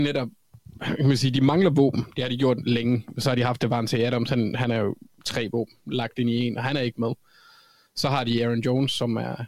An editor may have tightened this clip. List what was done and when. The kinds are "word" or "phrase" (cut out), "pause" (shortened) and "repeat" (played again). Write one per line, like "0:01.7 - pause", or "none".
none